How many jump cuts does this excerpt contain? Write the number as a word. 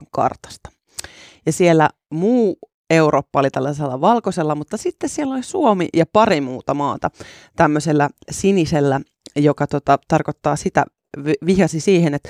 zero